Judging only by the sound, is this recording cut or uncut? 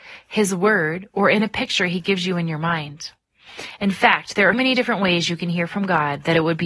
cut